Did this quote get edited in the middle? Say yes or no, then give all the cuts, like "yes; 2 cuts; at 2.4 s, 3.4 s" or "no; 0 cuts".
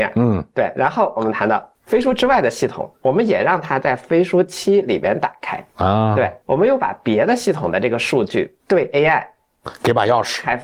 yes; 4 cuts; at 2.9 s, 5.7 s, 6.4 s, 8.6 s